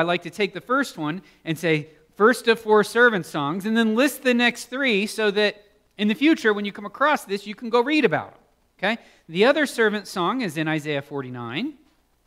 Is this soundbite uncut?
yes; 0 cuts

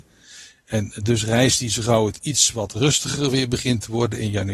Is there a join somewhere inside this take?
no; 0 cuts

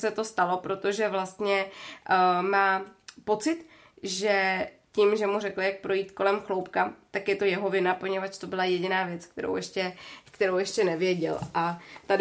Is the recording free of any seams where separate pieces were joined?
yes; 0 cuts

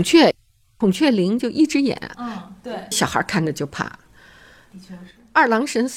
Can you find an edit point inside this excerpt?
yes; 2 cuts; at 2.1 s, 2.9 s

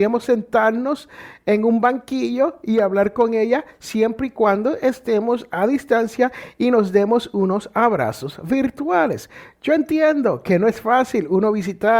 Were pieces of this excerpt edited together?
no; 0 cuts

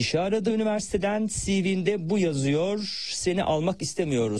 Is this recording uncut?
yes; 0 cuts

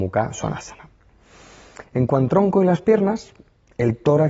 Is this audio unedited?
no; 1 cut; at 2.3 s

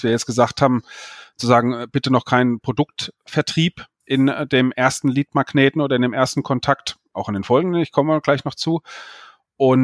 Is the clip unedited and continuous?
no; 1 cut; at 3.9 s

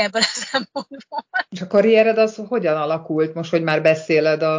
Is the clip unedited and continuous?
no; 1 cut; at 1.5 s

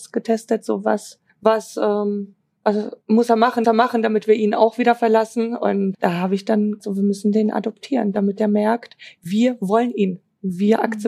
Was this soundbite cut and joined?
yes; 5 cuts; at 1.3 s, 3.0 s, 3.6 s, 5.9 s, 6.8 s

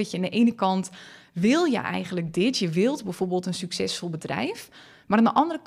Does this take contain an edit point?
no; 0 cuts

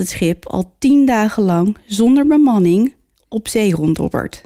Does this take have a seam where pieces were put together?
no; 0 cuts

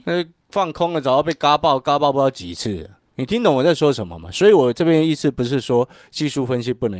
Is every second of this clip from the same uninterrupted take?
yes; 0 cuts

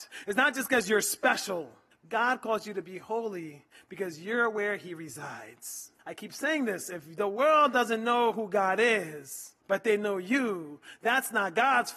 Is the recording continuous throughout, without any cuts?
no; 3 cuts; at 1.9 s, 6.0 s, 9.6 s

